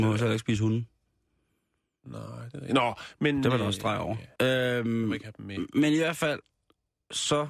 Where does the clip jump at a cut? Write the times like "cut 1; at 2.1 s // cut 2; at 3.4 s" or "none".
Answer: cut 1; at 4.4 s